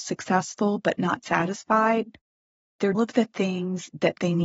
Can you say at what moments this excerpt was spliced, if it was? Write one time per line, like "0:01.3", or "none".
0:02.9